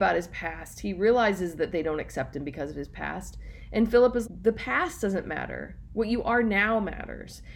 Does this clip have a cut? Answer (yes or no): yes